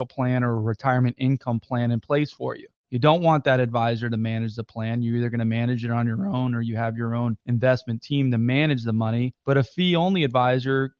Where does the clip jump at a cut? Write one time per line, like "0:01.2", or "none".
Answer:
none